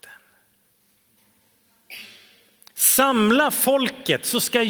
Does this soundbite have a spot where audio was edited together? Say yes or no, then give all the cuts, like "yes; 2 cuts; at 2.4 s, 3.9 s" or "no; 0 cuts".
no; 0 cuts